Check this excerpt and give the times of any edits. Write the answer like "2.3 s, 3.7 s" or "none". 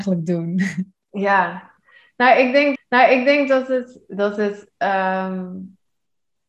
2.7 s